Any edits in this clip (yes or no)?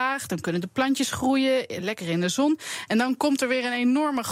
no